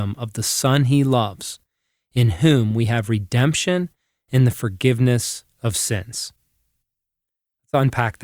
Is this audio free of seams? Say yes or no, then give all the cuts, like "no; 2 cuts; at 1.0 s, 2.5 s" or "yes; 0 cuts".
yes; 0 cuts